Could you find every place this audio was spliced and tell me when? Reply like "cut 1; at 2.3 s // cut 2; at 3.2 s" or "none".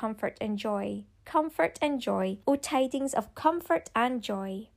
cut 1; at 1.1 s // cut 2; at 2.4 s